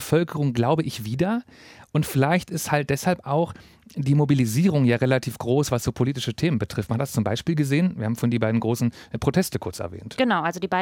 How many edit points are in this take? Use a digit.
0